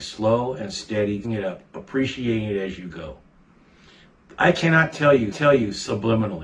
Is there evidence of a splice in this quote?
yes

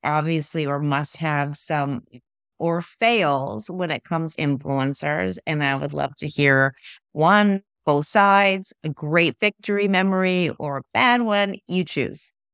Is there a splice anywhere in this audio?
yes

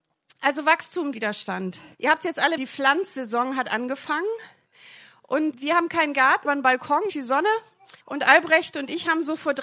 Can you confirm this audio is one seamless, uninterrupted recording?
no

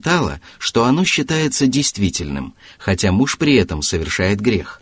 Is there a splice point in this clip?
no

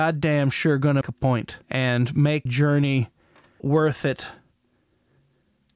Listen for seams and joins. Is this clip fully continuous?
no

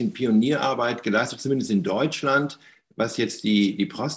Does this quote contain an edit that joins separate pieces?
no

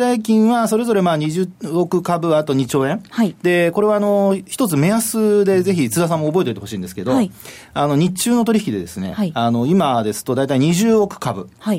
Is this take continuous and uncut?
no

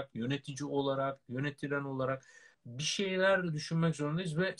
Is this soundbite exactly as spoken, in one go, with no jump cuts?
no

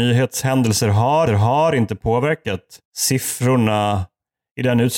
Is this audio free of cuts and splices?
no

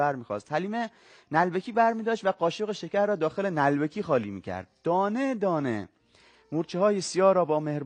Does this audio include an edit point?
no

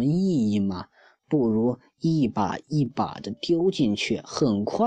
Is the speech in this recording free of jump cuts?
yes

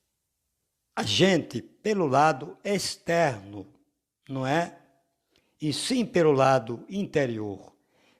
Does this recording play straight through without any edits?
yes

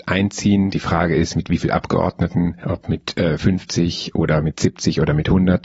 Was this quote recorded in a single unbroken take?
yes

